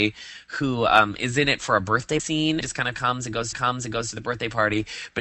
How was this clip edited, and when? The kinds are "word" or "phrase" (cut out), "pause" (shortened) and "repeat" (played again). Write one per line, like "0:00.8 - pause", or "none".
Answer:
0:02.2 - word
0:02.6 - phrase
0:03.5 - repeat